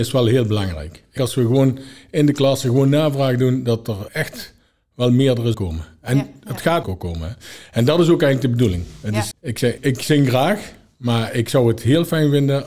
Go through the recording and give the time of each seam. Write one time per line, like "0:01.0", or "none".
0:01.2
0:04.1
0:05.5
0:06.8
0:09.3
0:09.8